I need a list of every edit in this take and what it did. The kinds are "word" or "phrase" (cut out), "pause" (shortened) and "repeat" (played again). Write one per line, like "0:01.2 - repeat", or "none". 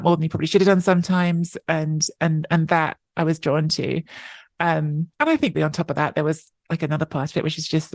0:05.1 - pause
0:05.5 - word